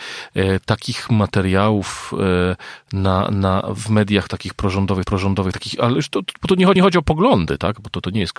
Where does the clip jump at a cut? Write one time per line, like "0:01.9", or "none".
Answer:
0:03.8
0:05.0
0:06.8

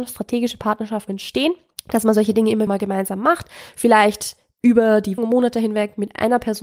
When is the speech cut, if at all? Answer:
0:01.1
0:01.7
0:02.7
0:05.2

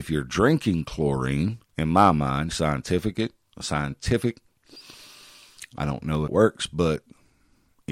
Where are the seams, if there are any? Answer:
0:01.7
0:02.5
0:06.3

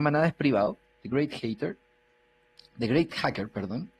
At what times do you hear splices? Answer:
none

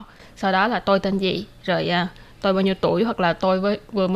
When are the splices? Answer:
none

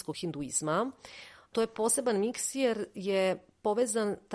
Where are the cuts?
none

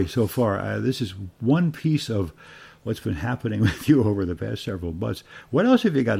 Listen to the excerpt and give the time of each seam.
none

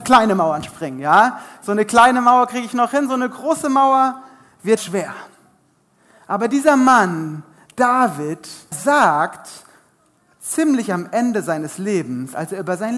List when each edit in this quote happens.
0:04.8
0:08.7

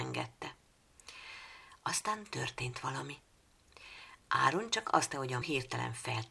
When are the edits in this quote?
0:05.1
0:05.4

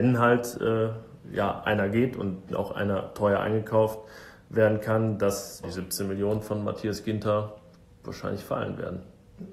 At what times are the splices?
0:01.2
0:02.5
0:05.6

